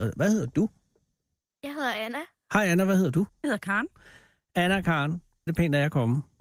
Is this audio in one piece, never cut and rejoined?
no; 1 cut; at 5.5 s

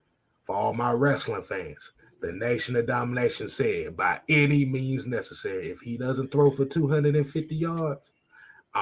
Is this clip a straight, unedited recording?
yes; 0 cuts

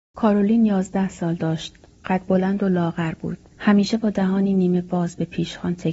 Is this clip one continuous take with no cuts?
yes; 0 cuts

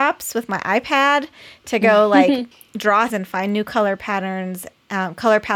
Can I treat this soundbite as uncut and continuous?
no; 2 cuts; at 2.5 s, 3.1 s

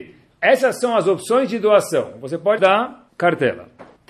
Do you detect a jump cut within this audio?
yes; 2 cuts; at 2.6 s, 3.1 s

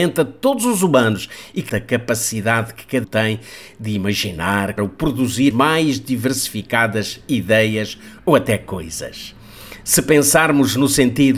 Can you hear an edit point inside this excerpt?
yes; 5 cuts; at 1.7 s, 3.0 s, 4.8 s, 5.5 s, 8.2 s

